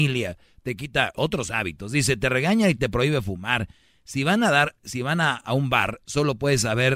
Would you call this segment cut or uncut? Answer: uncut